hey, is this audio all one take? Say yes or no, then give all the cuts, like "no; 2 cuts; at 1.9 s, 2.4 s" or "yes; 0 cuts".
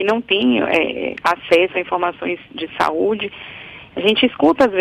yes; 0 cuts